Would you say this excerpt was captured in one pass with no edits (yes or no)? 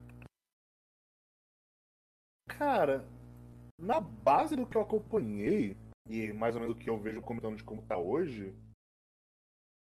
no